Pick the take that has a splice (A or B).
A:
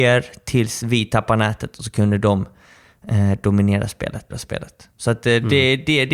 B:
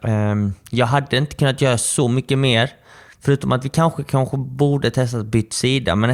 A